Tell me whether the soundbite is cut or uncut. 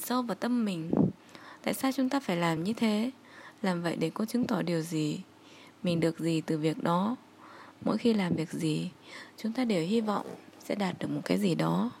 uncut